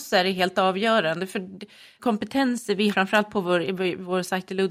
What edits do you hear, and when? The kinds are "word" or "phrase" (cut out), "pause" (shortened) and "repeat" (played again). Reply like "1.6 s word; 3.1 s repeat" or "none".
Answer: 2.0 s word; 2.9 s word